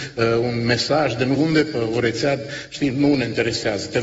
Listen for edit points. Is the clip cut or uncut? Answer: cut